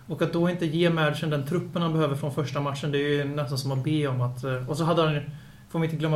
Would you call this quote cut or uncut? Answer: uncut